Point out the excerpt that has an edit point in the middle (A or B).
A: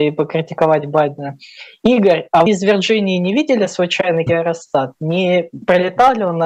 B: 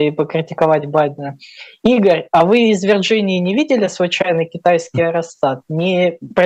A